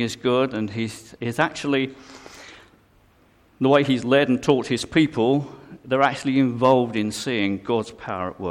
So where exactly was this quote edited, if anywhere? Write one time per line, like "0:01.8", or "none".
none